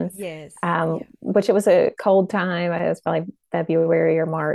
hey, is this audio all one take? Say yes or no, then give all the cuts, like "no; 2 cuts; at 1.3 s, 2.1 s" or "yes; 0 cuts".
yes; 0 cuts